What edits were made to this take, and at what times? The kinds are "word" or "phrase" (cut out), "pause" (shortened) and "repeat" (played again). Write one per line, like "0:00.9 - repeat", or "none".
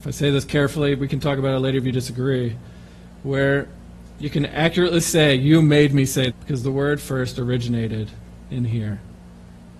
0:06.3 - word